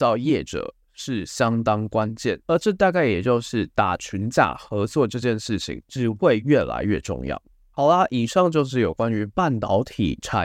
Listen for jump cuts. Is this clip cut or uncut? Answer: uncut